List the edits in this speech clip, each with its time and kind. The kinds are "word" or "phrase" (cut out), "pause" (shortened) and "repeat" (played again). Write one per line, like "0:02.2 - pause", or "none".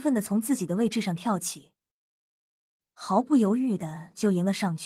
none